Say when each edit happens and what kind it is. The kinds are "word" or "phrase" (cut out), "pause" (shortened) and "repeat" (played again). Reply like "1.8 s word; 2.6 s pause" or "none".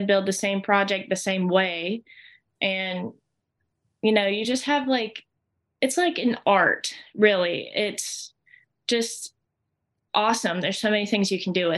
none

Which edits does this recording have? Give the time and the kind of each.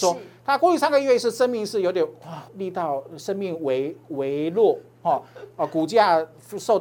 2.5 s pause

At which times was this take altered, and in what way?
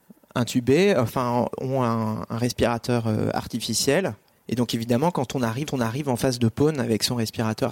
4.3 s pause; 5.7 s repeat

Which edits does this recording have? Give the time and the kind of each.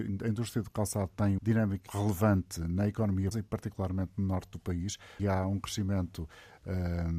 1.4 s word; 1.9 s word; 3.3 s word; 5.2 s word

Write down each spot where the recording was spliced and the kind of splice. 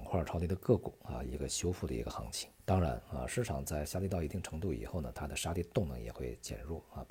2.6 s pause

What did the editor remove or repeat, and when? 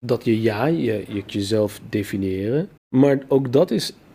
1.3 s word; 2.8 s pause

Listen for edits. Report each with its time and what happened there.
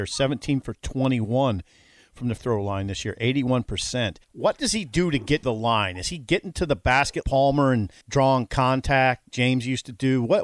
2.4 s word; 4.2 s pause; 5.4 s word; 7.2 s word; 8.0 s pause; 9.3 s word

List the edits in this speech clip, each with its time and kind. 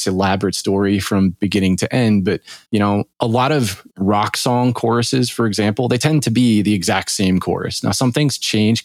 2.6 s pause; 3.1 s pause; 3.9 s pause

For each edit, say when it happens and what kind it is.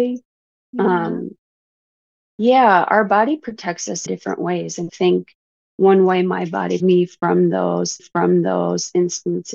4.1 s word; 4.9 s word; 6.8 s word; 8.0 s repeat

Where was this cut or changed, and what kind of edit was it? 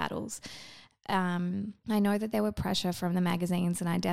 1.8 s pause

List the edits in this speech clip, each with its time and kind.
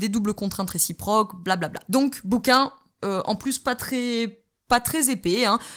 none

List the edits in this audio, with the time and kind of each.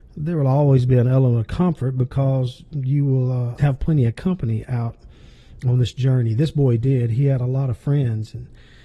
3.6 s word

